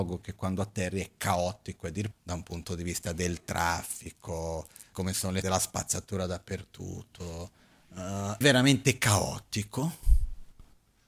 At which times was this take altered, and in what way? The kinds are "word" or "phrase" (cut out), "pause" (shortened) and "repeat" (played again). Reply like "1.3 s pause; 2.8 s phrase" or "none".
2.1 s word; 4.9 s word; 5.4 s word; 8.4 s word